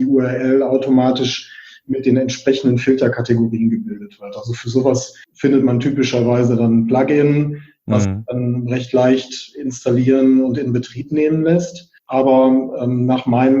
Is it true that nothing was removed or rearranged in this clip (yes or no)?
no